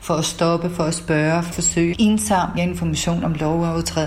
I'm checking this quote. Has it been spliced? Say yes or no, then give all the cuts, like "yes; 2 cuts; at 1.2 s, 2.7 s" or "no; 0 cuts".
yes; 3 cuts; at 1.5 s, 1.9 s, 2.6 s